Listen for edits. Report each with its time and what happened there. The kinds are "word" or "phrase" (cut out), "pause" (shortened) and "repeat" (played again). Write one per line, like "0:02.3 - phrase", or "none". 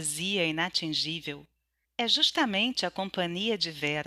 0:01.8 - pause